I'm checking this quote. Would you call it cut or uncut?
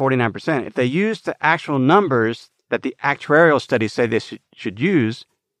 uncut